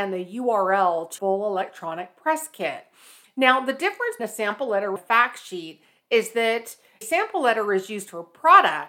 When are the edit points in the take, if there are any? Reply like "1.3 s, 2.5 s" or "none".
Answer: 1.2 s, 4.2 s, 5.0 s, 7.0 s